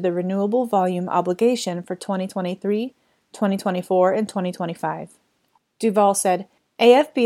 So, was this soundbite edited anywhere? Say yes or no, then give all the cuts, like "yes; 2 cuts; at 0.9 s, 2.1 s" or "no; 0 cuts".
no; 0 cuts